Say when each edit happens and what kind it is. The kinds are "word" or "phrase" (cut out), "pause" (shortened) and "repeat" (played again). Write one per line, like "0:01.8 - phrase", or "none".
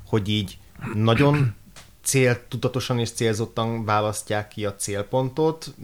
none